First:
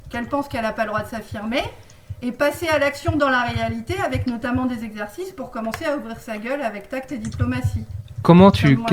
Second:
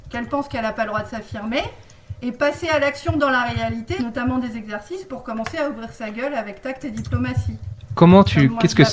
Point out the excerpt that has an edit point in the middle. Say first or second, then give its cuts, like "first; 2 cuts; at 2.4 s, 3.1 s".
second; 1 cut; at 4.0 s